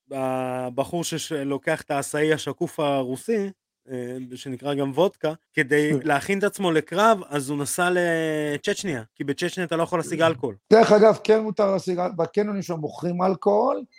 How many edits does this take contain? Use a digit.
3